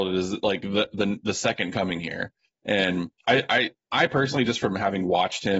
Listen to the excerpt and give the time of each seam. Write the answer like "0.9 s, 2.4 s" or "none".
3.2 s, 3.8 s